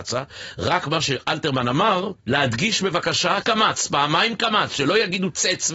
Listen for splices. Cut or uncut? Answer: cut